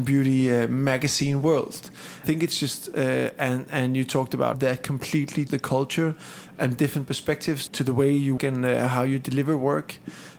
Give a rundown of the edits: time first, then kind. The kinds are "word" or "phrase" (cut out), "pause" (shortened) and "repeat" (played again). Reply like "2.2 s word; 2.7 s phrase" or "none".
2.2 s phrase; 4.5 s word; 5.5 s word; 6.8 s phrase; 7.7 s word; 8.4 s word